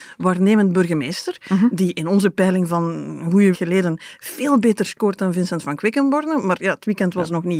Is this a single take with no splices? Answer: no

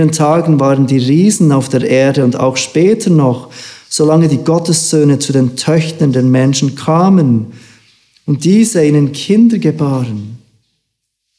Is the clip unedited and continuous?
yes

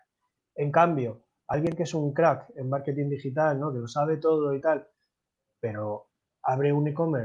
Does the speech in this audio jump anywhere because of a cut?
no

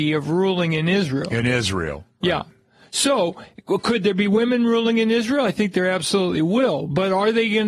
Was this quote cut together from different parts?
no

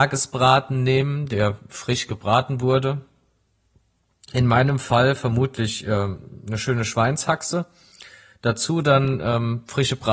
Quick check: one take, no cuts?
yes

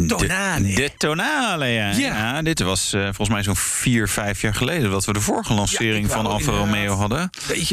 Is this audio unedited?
yes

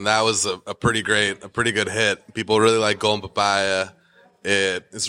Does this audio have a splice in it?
no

